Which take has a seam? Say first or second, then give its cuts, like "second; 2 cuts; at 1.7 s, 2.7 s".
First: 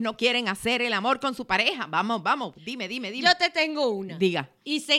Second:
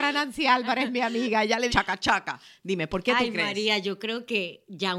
second; 1 cut; at 1.7 s